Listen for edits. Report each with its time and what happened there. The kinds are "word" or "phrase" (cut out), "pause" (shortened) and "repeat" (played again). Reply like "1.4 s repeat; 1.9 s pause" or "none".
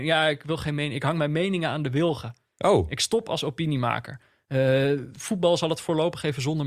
none